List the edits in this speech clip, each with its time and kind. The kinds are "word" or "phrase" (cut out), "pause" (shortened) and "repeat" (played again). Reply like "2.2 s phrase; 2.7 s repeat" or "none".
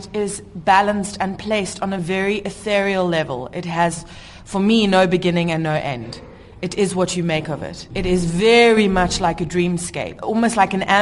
none